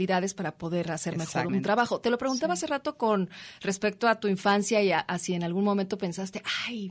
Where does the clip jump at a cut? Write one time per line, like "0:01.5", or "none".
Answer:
0:01.5